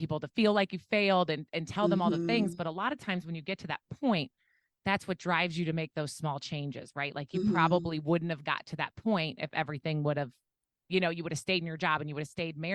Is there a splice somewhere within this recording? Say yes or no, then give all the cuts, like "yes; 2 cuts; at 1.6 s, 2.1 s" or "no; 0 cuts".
no; 0 cuts